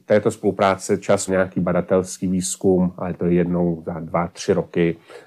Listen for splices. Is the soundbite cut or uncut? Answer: cut